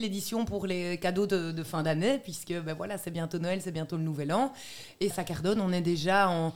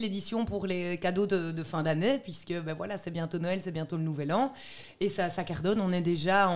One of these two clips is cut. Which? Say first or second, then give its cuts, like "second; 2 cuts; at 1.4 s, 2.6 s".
first; 1 cut; at 5.1 s